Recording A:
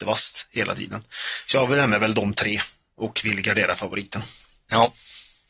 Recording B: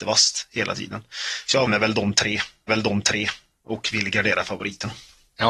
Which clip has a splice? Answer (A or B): B